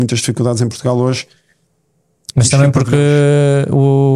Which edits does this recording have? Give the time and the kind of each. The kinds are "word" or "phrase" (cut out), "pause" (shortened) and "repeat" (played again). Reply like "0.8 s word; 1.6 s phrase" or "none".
none